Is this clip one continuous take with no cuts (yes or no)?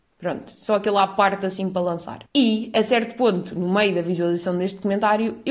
no